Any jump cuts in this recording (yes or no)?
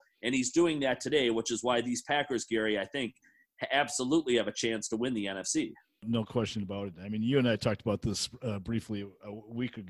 no